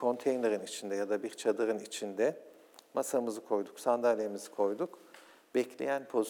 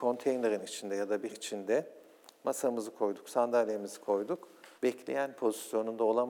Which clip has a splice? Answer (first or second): second